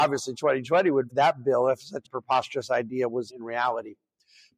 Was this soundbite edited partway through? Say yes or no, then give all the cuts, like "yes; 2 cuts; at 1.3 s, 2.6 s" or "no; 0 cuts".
yes; 3 cuts; at 1.1 s, 2.0 s, 3.3 s